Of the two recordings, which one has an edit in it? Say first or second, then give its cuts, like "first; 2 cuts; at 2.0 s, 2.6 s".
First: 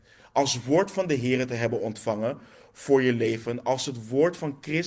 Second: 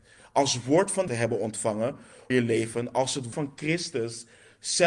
second; 3 cuts; at 1.1 s, 2.3 s, 3.3 s